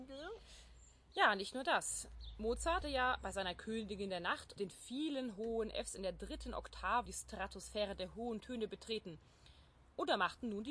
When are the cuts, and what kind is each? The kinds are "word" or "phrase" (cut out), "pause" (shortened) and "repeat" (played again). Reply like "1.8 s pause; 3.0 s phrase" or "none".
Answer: 2.8 s word; 4.5 s word; 7.1 s word